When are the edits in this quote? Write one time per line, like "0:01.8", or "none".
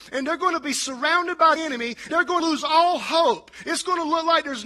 0:01.6
0:02.1
0:02.4